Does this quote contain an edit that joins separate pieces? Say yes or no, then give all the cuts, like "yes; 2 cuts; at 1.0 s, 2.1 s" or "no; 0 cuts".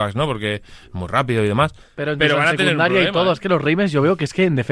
yes; 1 cut; at 1.8 s